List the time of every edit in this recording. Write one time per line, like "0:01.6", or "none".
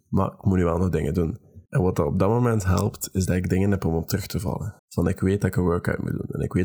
0:01.7
0:04.8